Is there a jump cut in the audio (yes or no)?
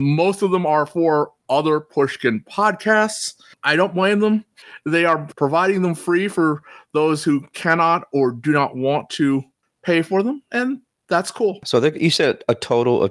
no